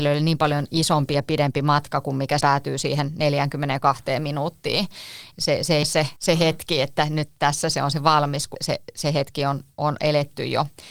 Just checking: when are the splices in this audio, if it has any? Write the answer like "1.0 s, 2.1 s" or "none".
2.4 s, 5.8 s, 6.2 s, 8.5 s